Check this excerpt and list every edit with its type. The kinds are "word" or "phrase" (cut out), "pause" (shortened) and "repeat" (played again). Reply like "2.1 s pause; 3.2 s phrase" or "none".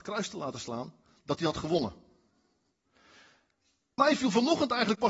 4.0 s word